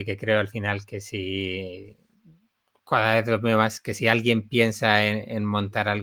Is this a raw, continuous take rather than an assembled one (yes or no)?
yes